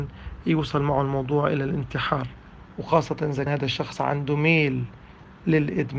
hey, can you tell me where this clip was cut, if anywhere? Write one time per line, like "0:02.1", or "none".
0:03.5